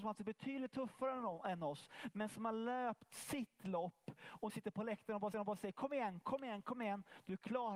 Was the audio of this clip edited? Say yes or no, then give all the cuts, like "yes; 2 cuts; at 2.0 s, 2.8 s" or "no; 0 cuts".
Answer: yes; 2 cuts; at 4.5 s, 5.3 s